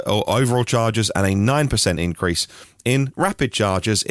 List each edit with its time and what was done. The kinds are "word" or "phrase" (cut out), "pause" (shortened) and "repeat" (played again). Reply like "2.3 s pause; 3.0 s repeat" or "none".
none